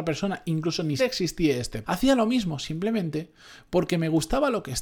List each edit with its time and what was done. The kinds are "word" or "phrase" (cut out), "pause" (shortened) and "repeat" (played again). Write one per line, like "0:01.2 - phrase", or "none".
0:01.0 - word
0:01.8 - word